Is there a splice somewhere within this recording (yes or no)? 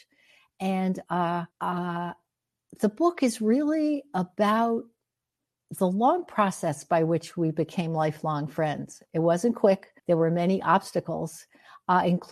yes